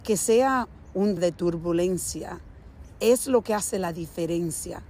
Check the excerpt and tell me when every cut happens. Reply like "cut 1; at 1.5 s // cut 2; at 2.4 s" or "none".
cut 1; at 1.2 s